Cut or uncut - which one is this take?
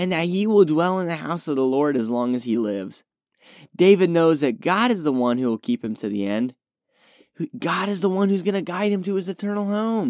uncut